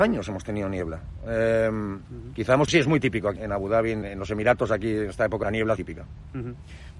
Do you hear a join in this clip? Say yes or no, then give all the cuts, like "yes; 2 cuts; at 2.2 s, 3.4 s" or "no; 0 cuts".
yes; 5 cuts; at 2.7 s, 3.4 s, 4.0 s, 5.4 s, 5.8 s